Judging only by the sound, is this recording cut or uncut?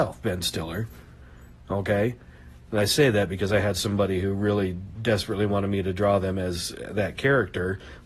uncut